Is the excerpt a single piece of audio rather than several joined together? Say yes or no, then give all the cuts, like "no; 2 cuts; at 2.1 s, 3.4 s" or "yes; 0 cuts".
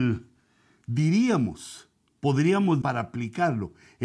no; 1 cut; at 2.8 s